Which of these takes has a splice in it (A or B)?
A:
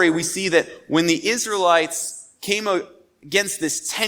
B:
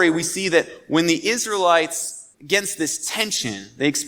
B